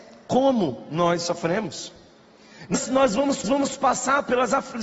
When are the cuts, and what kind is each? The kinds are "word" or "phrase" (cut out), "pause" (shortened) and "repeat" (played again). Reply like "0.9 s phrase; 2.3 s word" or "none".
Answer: 2.7 s word; 3.4 s repeat